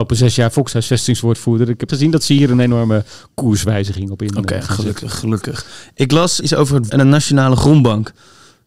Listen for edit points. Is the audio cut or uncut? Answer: cut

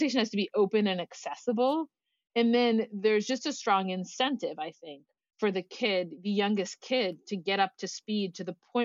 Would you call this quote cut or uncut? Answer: uncut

